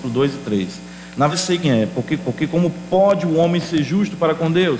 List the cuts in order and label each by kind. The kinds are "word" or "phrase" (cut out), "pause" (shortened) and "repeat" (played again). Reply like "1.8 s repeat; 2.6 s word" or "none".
1.3 s word; 1.6 s word; 2.2 s repeat